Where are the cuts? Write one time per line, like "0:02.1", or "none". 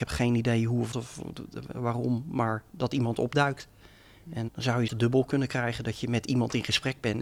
0:00.9
0:04.5
0:04.9